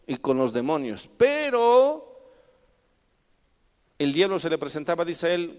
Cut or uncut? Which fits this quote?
uncut